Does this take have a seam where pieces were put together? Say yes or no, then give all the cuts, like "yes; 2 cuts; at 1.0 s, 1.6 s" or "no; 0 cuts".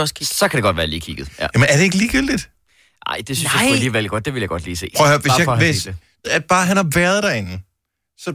yes; 1 cut; at 6.2 s